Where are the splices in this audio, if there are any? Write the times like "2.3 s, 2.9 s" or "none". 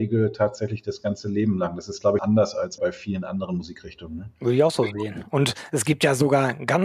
2.2 s, 2.8 s